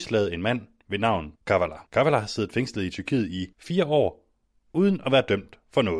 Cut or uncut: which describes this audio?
cut